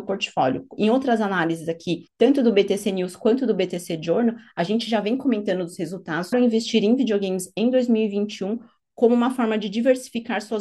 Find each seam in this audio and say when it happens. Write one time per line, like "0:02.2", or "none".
0:02.1
0:06.3